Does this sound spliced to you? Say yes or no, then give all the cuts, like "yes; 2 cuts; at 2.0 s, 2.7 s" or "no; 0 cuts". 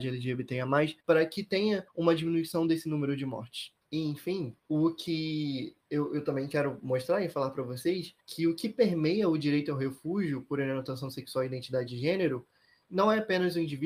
yes; 6 cuts; at 1.0 s, 1.9 s, 3.8 s, 4.6 s, 5.8 s, 8.2 s